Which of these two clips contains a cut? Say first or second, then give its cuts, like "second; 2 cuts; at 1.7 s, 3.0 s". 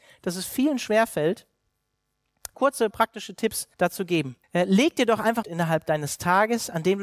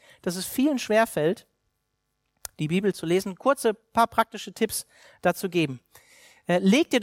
first; 5 cuts; at 2.5 s, 2.9 s, 3.7 s, 4.4 s, 5.4 s